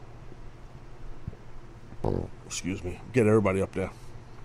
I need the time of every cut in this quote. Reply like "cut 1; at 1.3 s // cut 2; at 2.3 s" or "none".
none